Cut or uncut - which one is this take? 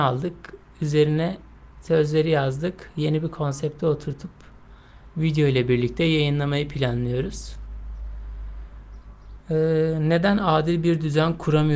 uncut